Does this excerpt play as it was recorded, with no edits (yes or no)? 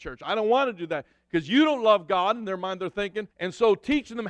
no